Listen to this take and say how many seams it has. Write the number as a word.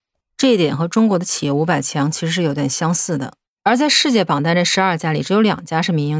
zero